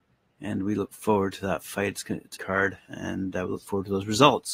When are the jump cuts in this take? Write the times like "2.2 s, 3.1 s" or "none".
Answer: 2.4 s

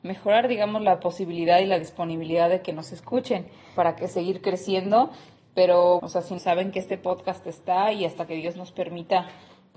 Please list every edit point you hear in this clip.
3.8 s, 6.0 s, 6.4 s

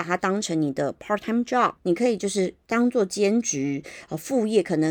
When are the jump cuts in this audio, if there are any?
1.8 s

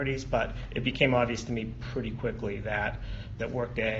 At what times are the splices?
none

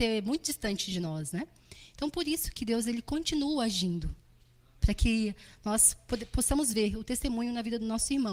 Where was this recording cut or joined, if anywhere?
none

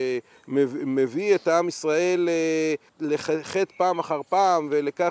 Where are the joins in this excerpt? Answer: 2.9 s

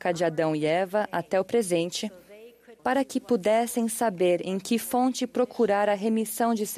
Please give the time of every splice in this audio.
2.8 s

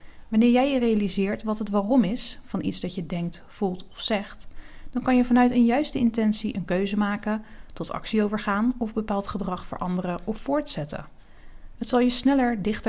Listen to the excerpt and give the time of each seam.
none

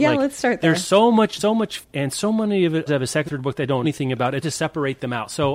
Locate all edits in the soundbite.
1.4 s, 1.8 s, 2.9 s, 3.3 s, 3.8 s, 4.4 s

